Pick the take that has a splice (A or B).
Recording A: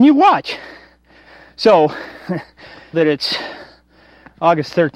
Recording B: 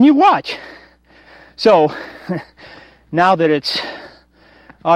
A